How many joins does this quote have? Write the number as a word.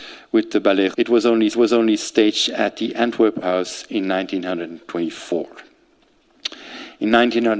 three